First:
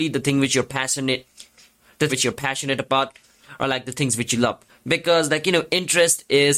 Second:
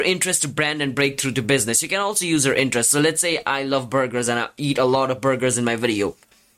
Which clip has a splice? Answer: first; 2 cuts; at 2.1 s, 4.7 s

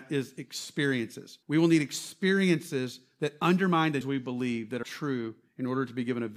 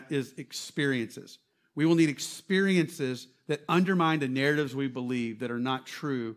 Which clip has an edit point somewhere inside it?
first; 3 cuts; at 1.4 s, 4.0 s, 4.8 s

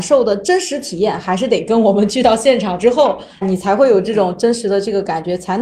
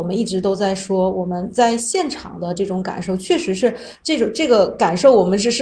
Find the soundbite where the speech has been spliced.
first; 1 cut; at 3.4 s

